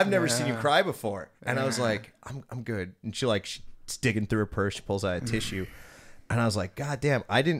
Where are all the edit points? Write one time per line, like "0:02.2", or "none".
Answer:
0:01.4